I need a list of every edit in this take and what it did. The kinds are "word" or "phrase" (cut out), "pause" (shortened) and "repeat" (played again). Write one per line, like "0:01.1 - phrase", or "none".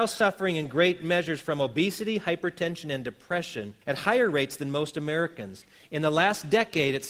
0:03.8 - pause

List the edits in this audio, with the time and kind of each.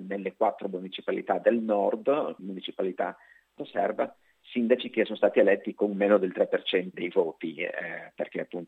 0:02.4 - word
0:03.6 - word
0:06.9 - word

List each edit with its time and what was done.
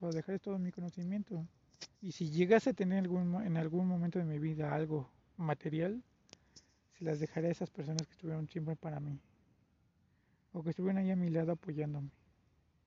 0:01.9 - pause

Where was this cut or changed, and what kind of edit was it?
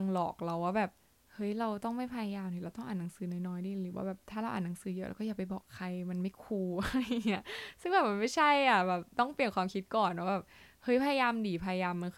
0:01.0 - pause

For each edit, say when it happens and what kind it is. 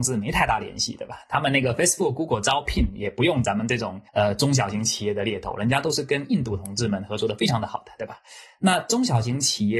0:04.1 - pause

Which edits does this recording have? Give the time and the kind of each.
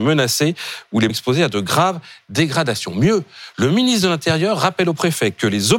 0:01.1 - word

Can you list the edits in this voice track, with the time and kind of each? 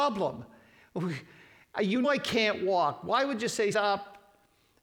0:02.0 - word
0:03.7 - word

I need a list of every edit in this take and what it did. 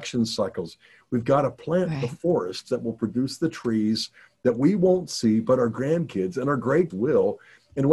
0:06.9 - word

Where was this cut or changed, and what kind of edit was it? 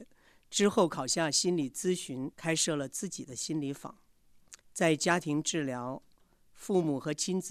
0:02.3 - pause
0:04.6 - pause

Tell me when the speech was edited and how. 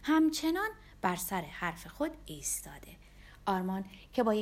none

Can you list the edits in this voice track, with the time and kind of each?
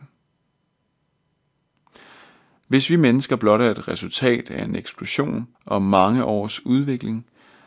0:05.5 - pause

